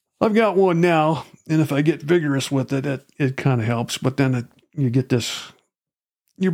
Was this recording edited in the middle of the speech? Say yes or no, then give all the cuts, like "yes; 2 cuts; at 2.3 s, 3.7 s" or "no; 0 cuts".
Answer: no; 0 cuts